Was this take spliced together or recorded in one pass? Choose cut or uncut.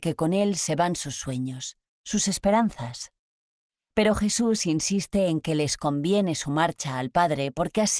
uncut